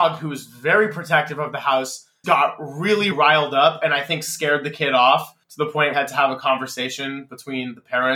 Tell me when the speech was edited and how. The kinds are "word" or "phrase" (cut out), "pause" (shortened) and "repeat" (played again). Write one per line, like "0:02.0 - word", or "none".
0:02.2 - word
0:03.1 - word
0:05.4 - pause
0:05.9 - phrase